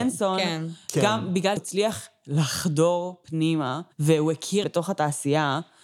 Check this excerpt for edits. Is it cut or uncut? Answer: cut